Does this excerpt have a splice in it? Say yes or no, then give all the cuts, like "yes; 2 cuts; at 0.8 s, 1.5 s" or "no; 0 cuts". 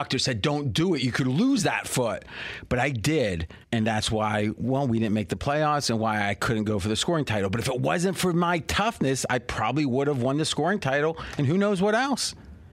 yes; 1 cut; at 3.6 s